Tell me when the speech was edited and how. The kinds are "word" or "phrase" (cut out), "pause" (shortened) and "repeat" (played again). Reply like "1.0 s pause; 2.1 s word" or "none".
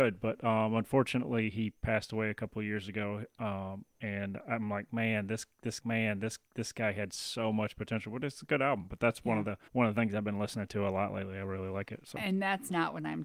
5.8 s repeat; 9.7 s pause